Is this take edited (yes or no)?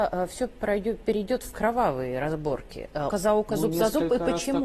yes